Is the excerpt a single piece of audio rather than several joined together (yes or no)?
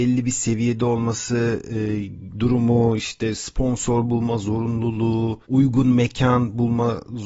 no